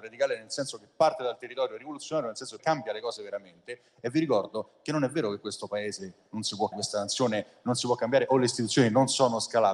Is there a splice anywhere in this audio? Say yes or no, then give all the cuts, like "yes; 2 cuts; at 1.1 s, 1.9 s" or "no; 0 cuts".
yes; 2 cuts; at 2.6 s, 6.7 s